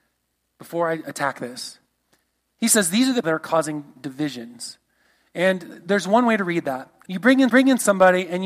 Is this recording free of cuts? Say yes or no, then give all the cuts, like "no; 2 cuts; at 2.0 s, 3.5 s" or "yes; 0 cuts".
no; 3 cuts; at 3.2 s, 7.1 s, 7.5 s